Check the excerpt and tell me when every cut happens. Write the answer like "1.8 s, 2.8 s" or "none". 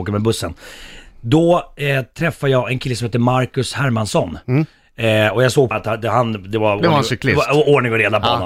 5.7 s